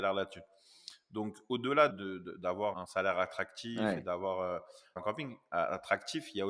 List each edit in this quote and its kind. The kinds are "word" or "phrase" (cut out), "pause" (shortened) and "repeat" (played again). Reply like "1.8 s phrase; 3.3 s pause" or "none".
1.9 s word; 2.7 s word; 5.0 s word